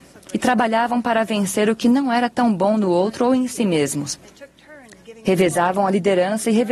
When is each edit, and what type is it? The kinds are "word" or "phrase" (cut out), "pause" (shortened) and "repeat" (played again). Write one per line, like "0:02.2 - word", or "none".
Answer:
none